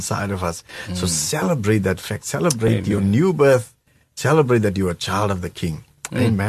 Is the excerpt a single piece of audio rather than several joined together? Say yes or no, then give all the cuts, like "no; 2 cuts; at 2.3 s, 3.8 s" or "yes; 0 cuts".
yes; 0 cuts